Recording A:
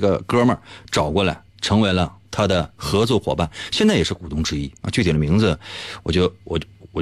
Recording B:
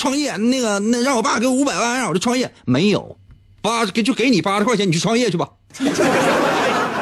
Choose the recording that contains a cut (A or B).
A